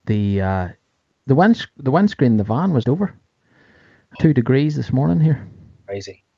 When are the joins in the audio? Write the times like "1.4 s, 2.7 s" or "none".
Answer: 2.8 s, 4.1 s